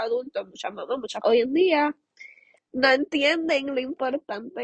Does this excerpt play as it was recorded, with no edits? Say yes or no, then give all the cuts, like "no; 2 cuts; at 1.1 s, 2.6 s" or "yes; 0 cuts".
no; 2 cuts; at 1.2 s, 2.6 s